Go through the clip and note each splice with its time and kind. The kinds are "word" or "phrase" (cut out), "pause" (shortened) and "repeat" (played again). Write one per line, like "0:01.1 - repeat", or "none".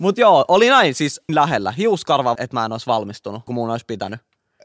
0:01.3 - word
0:02.3 - word
0:03.5 - word